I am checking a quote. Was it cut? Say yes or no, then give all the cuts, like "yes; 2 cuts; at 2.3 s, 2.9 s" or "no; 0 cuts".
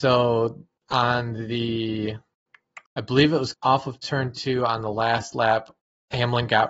yes; 2 cuts; at 2.9 s, 3.5 s